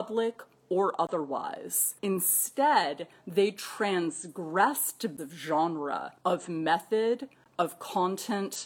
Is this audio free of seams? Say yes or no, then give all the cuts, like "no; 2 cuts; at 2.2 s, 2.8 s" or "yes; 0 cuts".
no; 3 cuts; at 2.0 s, 5.2 s, 6.2 s